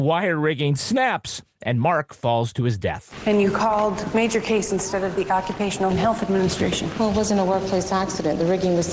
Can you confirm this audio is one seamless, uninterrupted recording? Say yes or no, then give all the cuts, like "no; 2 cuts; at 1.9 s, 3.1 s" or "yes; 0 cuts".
no; 1 cut; at 5.9 s